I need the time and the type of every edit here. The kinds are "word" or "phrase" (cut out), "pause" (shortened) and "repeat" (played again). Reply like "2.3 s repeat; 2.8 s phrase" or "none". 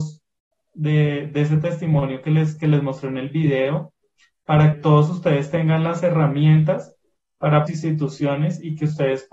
4.7 s word; 7.7 s phrase